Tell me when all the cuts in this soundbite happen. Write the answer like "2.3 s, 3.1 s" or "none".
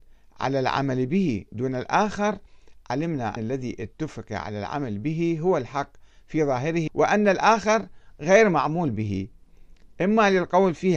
3.4 s, 6.9 s